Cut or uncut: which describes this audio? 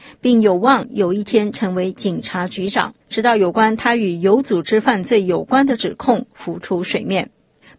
cut